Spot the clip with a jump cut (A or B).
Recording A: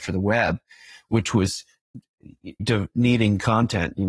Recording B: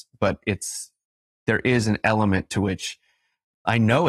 A